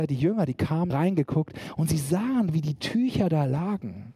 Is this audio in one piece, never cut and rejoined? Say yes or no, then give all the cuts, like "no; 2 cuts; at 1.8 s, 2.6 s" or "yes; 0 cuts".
no; 1 cut; at 0.9 s